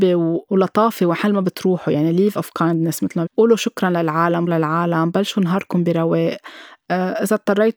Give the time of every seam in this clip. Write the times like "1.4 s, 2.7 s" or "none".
2.4 s, 3.3 s, 4.5 s